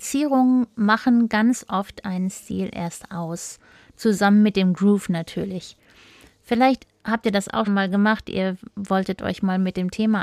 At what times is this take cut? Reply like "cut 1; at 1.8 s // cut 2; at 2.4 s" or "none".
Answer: cut 1; at 7.7 s